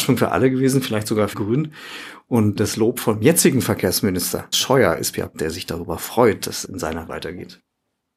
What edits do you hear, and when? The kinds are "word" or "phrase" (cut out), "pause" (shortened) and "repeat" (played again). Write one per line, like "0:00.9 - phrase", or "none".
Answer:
0:01.3 - word
0:02.6 - word
0:04.5 - word
0:05.3 - word
0:06.6 - word
0:07.1 - word